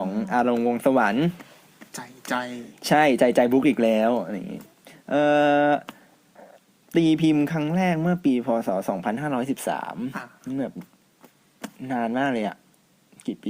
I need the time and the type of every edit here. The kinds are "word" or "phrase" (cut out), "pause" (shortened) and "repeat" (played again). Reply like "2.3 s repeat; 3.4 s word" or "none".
none

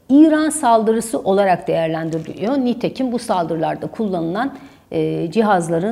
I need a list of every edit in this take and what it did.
none

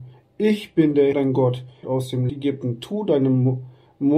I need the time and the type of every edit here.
1.1 s word; 1.8 s phrase; 2.3 s word

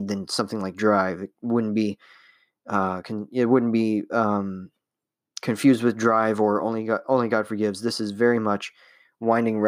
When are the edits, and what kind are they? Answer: 1.4 s pause

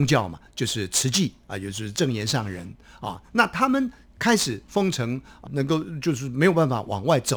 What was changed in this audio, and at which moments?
5.5 s word

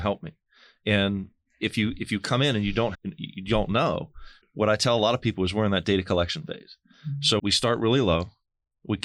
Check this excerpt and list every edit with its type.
2.9 s word; 4.4 s word; 7.4 s word

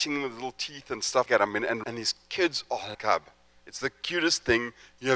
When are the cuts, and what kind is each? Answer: 1.3 s word; 1.8 s word; 2.9 s phrase

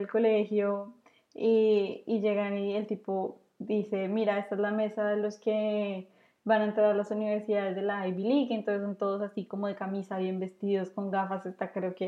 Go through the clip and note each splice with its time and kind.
none

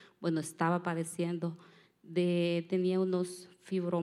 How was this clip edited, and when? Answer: none

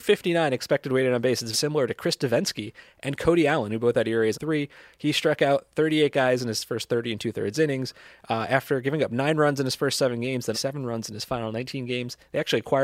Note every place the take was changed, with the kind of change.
1.5 s word; 4.3 s word; 10.5 s word

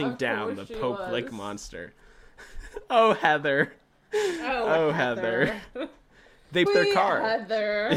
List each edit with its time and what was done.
6.7 s word

